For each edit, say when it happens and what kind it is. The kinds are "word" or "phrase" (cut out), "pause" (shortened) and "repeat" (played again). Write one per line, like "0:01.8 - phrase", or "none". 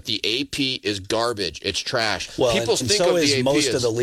0:02.8 - word